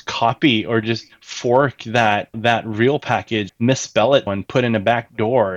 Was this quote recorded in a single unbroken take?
no; 3 cuts; at 2.3 s, 3.5 s, 4.3 s

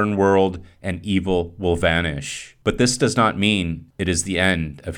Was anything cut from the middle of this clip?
no; 0 cuts

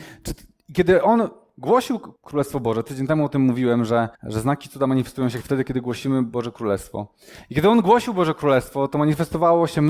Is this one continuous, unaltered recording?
no; 2 cuts; at 2.2 s, 4.1 s

